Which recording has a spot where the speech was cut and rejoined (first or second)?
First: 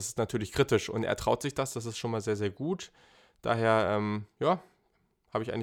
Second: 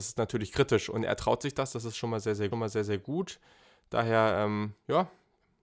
second